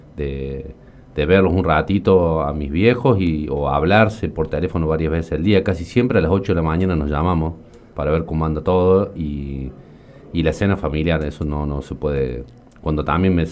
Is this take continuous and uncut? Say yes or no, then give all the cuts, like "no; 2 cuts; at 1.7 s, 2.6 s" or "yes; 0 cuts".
no; 1 cut; at 7.9 s